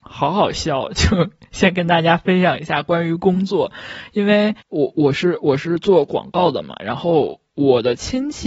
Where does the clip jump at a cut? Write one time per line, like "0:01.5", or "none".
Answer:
0:04.6